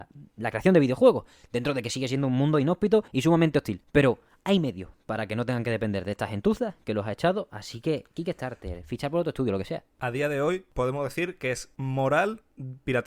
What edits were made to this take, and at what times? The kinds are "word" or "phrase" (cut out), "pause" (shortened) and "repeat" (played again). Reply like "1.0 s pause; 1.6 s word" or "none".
none